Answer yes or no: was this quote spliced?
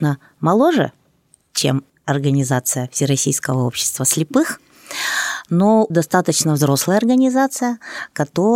yes